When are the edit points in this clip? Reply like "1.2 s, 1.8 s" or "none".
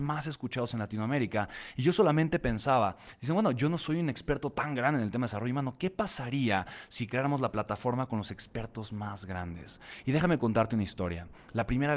none